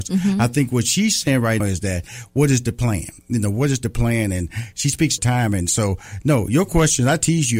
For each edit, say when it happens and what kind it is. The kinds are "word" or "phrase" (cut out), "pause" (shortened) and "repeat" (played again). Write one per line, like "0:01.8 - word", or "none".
0:01.6 - word
0:05.2 - phrase